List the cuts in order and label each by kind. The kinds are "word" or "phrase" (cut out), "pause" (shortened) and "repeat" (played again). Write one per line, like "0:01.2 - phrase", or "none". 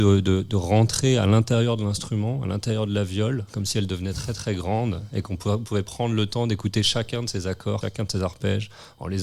0:07.8 - phrase